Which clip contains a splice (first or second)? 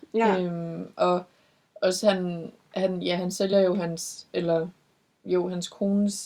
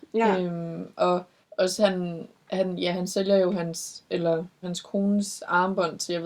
second